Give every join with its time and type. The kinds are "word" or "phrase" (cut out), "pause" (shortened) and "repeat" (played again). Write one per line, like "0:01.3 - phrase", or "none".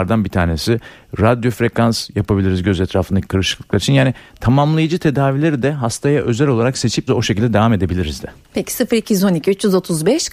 0:07.1 - word